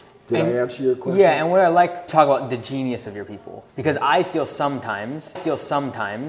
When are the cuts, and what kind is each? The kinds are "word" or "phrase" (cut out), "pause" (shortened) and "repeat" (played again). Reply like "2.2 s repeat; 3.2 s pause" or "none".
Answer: 2.1 s word; 3.7 s pause; 5.4 s repeat